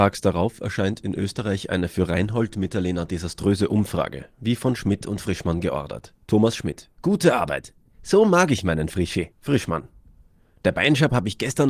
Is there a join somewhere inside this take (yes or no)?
yes